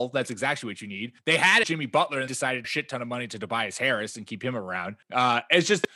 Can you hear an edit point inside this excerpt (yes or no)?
yes